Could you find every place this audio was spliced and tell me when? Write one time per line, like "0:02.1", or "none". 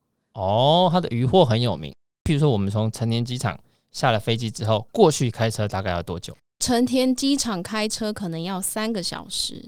0:06.4